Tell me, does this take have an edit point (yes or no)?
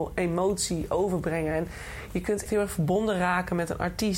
yes